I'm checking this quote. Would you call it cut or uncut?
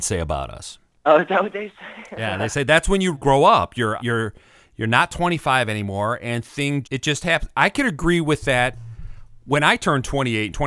cut